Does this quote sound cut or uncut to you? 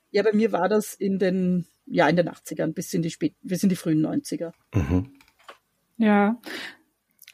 uncut